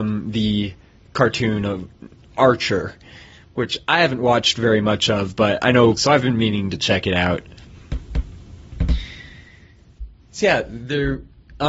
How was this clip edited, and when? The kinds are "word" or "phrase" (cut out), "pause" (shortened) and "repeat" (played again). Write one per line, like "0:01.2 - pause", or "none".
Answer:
0:06.0 - phrase